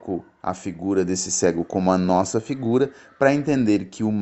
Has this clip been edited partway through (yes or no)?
no